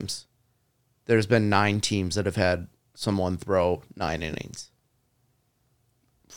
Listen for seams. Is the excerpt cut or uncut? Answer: uncut